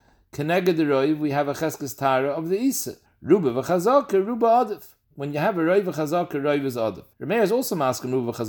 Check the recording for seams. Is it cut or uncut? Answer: cut